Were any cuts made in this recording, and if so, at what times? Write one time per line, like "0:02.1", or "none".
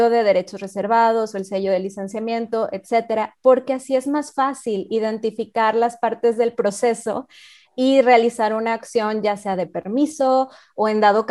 none